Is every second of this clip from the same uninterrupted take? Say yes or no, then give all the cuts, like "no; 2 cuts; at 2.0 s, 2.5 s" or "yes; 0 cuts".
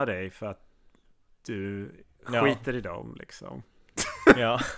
yes; 0 cuts